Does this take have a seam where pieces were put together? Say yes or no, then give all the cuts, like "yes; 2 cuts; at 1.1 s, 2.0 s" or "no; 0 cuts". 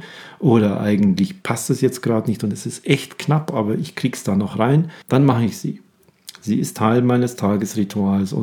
yes; 1 cut; at 5.0 s